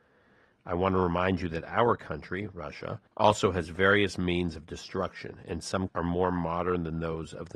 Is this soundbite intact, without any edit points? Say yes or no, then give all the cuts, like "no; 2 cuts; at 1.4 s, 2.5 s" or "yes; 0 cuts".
no; 2 cuts; at 3.1 s, 5.9 s